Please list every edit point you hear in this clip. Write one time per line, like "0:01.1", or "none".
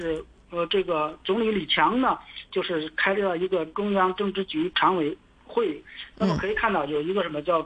none